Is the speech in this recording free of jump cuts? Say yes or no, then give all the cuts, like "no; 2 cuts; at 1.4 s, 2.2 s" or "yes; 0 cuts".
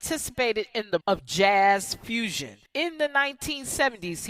no; 2 cuts; at 1.0 s, 2.7 s